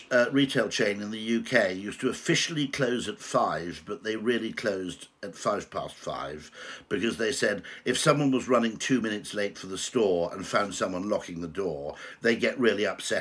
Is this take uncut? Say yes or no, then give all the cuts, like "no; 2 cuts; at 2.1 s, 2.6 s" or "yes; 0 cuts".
yes; 0 cuts